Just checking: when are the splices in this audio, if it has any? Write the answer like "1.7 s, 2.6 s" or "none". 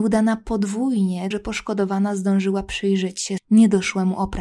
1.3 s, 3.4 s